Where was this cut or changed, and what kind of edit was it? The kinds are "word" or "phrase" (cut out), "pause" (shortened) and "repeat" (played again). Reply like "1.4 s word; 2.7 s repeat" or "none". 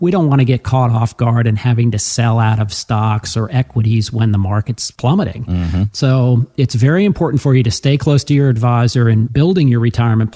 none